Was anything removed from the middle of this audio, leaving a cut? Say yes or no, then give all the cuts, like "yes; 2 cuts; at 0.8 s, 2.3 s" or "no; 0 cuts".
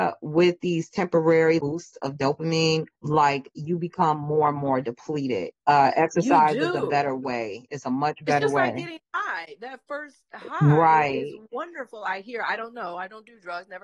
yes; 3 cuts; at 1.6 s, 3.0 s, 5.6 s